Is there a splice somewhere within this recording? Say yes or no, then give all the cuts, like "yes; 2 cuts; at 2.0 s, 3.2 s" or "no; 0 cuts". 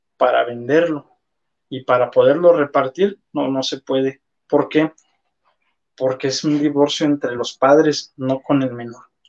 no; 0 cuts